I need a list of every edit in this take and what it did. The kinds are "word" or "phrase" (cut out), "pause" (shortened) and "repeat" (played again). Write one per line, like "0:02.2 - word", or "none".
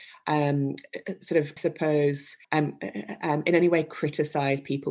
0:01.6 - word
0:02.4 - pause